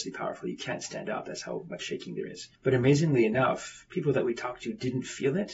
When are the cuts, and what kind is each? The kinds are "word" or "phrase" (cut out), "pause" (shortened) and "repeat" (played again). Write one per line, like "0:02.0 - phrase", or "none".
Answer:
0:02.5 - pause